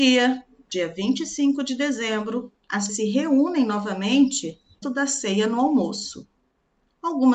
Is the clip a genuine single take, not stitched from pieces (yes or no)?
no